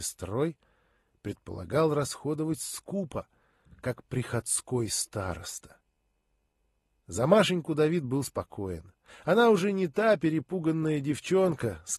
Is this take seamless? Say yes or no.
yes